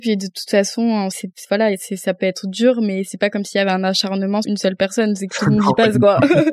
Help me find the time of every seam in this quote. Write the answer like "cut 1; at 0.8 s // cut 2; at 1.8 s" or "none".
cut 1; at 1.1 s // cut 2; at 4.4 s